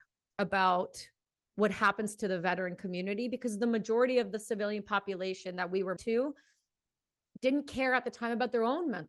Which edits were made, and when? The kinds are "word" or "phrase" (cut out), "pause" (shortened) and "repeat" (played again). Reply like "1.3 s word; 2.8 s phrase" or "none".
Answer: 6.0 s word